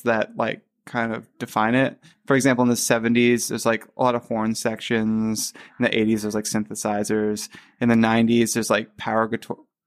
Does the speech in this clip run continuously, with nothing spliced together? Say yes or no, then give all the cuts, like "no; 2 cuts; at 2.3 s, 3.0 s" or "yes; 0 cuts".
yes; 0 cuts